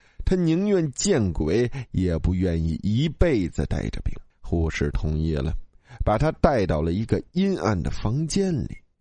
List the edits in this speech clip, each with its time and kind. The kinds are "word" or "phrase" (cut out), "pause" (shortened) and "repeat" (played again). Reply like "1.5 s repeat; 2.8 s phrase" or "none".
4.3 s pause